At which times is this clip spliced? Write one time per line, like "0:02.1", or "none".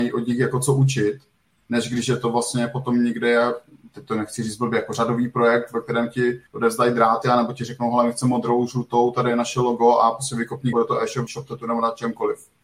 0:06.5
0:10.7
0:11.3